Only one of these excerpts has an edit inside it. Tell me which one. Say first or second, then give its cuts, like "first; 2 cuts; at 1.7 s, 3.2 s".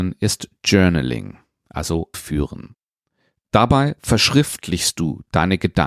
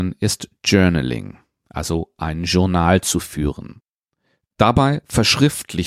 first; 1 cut; at 2.1 s